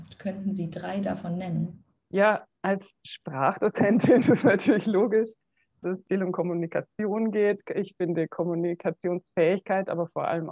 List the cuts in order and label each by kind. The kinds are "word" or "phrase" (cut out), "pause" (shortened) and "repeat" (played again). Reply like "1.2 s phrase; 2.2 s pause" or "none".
2.6 s pause; 4.2 s word; 5.8 s word